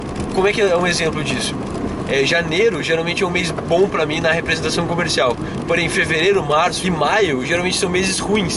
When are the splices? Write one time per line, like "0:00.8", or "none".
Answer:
0:06.8